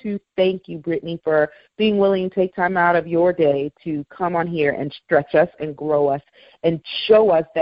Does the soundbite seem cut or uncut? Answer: uncut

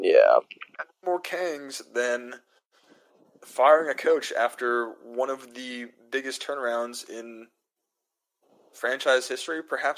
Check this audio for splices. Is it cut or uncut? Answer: uncut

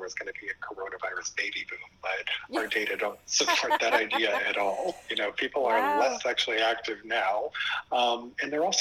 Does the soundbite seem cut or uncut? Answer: uncut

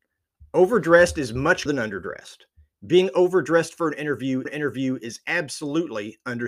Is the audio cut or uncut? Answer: cut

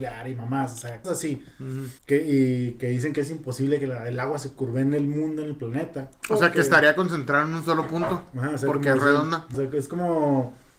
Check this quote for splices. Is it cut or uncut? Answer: cut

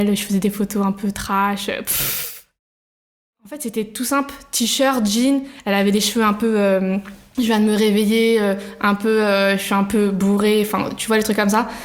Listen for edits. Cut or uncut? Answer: uncut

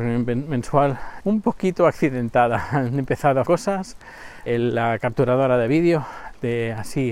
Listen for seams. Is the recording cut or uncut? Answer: cut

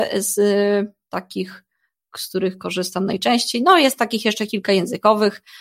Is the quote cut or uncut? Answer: uncut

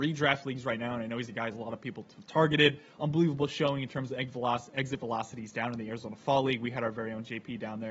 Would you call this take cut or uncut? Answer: uncut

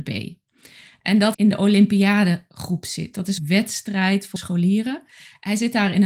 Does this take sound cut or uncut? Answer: cut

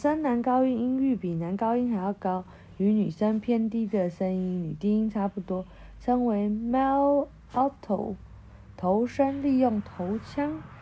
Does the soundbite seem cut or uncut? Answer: uncut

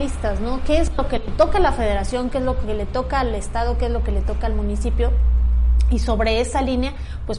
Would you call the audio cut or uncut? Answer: uncut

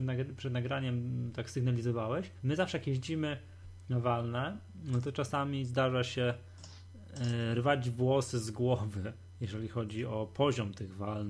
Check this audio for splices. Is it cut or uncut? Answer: cut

